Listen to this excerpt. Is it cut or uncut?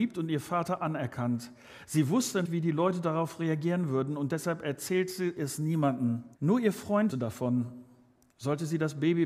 cut